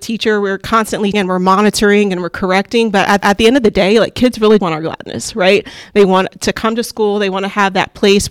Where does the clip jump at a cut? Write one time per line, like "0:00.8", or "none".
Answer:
0:01.1
0:03.2
0:04.6